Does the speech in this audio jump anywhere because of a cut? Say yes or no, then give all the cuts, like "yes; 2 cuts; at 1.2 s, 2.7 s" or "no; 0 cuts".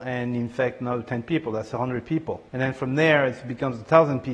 yes; 1 cut; at 2.5 s